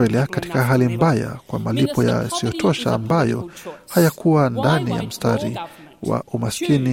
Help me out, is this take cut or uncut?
uncut